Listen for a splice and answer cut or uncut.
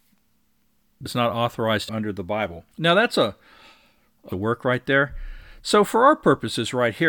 cut